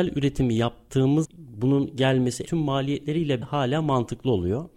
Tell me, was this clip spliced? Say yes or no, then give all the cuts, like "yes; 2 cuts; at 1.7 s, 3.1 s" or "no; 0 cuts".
yes; 3 cuts; at 1.2 s, 2.4 s, 3.4 s